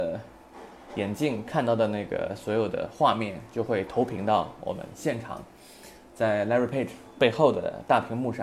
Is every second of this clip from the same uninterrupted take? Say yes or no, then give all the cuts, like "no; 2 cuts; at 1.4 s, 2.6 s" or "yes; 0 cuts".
yes; 0 cuts